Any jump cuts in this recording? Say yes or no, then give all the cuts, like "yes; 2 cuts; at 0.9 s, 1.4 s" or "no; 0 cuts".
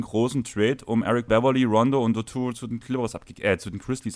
yes; 1 cut; at 1.3 s